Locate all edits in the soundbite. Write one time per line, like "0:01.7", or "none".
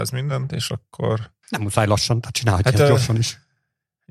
0:01.4

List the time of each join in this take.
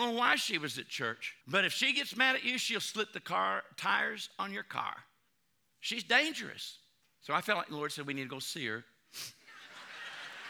0:01.4
0:05.3
0:07.0

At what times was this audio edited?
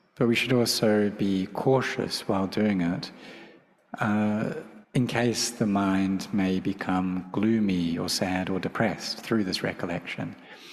0:04.8

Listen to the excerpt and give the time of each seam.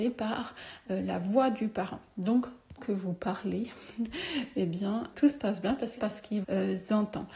0:02.8
0:05.1
0:06.0
0:06.4

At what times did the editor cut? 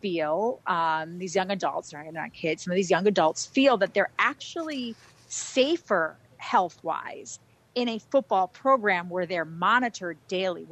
none

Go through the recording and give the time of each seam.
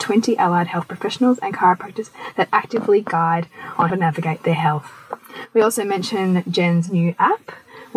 0:03.9

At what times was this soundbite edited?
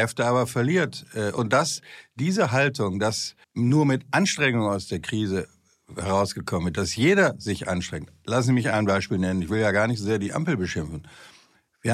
0:03.4

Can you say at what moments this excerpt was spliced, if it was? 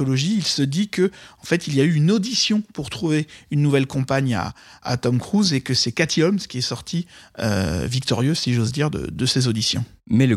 none

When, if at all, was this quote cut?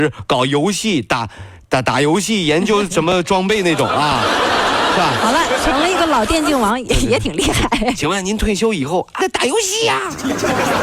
0:09.2

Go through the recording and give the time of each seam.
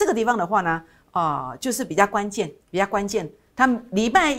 0:02.6

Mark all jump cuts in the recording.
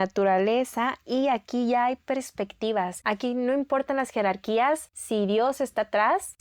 none

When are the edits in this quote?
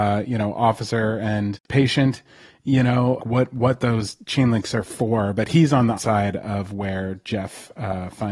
0:03.2
0:06.0

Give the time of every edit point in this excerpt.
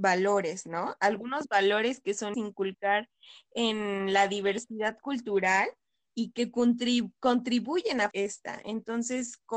0:02.3
0:08.1

